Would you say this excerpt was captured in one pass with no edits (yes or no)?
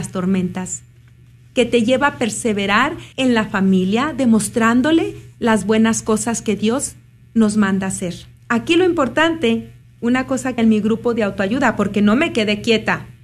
no